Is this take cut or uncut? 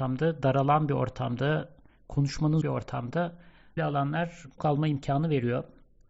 cut